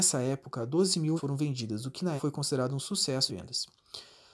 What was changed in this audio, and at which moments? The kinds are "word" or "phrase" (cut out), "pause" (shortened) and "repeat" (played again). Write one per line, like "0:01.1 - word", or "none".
0:01.2 - word
0:02.2 - word
0:03.3 - word